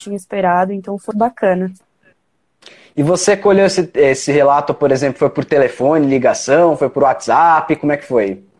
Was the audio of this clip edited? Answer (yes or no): yes